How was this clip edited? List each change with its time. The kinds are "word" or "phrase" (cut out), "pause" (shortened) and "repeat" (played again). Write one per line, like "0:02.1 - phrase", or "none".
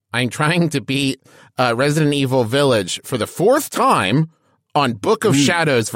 none